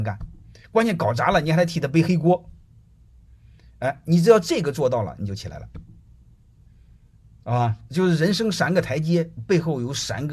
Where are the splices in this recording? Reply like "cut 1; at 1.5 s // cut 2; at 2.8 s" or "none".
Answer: none